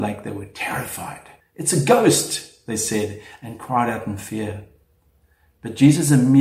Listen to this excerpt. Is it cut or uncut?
cut